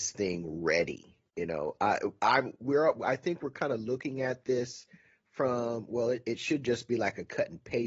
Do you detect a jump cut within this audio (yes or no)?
yes